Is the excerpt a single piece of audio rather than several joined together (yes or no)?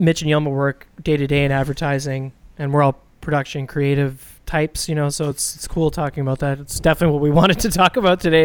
yes